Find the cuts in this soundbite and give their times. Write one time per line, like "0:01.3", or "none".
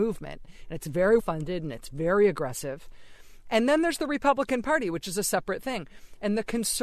0:01.2